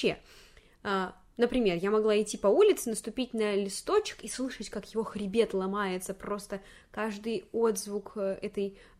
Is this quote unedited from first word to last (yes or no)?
yes